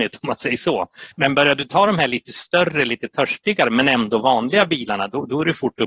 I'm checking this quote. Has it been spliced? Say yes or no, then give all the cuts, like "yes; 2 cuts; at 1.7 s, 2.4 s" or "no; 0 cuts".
yes; 1 cut; at 1.1 s